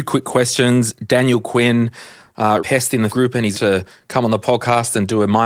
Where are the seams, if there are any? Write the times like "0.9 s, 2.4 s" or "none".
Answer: 2.6 s, 3.1 s, 3.5 s